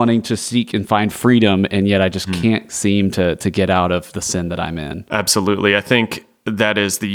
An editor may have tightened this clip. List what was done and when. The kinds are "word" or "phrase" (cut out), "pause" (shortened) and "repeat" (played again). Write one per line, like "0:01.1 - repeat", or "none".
none